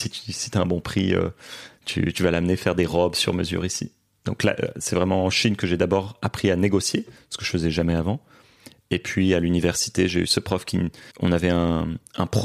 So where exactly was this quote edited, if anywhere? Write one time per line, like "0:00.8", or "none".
0:11.1